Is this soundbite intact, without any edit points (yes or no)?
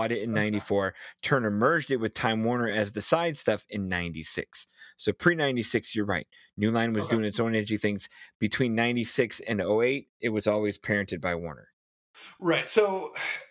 yes